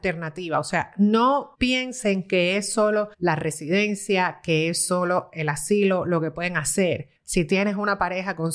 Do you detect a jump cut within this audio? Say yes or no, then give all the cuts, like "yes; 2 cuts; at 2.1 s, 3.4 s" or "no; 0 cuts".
yes; 3 cuts; at 1.5 s, 3.1 s, 7.2 s